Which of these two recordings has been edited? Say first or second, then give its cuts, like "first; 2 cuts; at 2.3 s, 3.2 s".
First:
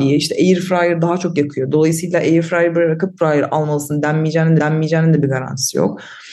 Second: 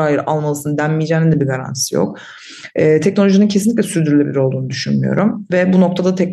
first; 2 cuts; at 3.2 s, 4.6 s